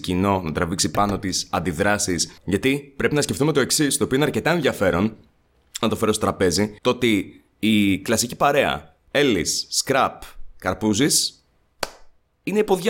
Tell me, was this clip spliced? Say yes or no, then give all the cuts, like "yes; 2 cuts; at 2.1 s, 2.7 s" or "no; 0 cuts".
yes; 3 cuts; at 2.4 s, 5.8 s, 6.8 s